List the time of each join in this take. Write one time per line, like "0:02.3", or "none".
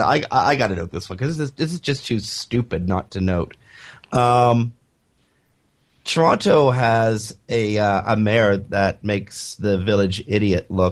none